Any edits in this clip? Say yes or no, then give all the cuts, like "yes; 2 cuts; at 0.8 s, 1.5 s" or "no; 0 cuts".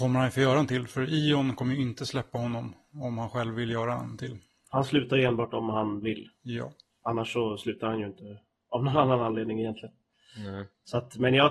no; 0 cuts